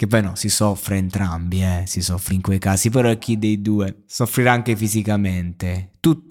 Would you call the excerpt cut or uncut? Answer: cut